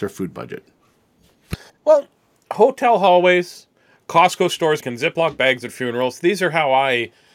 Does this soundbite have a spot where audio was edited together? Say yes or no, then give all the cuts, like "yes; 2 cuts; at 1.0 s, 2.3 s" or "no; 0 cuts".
yes; 1 cut; at 4.8 s